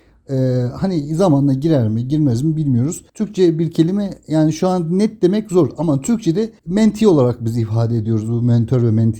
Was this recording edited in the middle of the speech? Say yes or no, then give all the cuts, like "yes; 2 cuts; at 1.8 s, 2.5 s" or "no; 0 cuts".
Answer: yes; 2 cuts; at 3.1 s, 6.6 s